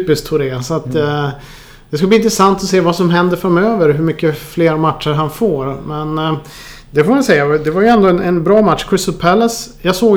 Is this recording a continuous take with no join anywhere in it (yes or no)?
yes